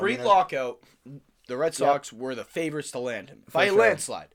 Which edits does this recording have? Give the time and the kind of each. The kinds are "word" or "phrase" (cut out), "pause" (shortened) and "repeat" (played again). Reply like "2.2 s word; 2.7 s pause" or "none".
none